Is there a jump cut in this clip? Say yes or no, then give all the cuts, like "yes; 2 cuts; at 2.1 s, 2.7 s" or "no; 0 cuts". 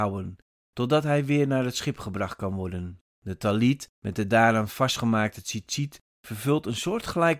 yes; 2 cuts; at 3.1 s, 3.9 s